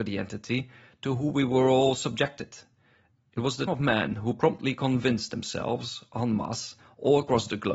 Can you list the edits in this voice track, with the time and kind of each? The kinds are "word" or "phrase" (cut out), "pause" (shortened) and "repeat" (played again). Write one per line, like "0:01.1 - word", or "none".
0:03.7 - word